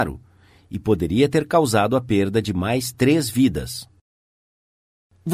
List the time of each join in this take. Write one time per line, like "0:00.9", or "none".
none